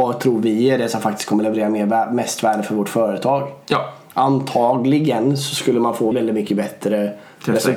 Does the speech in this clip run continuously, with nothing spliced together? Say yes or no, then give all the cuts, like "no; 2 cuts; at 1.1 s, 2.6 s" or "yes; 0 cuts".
no; 1 cut; at 6.1 s